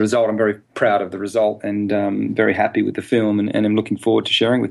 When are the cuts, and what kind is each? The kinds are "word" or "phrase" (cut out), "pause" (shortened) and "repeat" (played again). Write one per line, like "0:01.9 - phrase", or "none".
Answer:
none